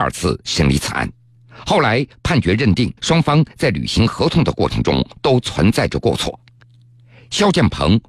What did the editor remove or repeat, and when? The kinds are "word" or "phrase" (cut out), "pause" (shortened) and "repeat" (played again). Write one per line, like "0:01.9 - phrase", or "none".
0:03.0 - pause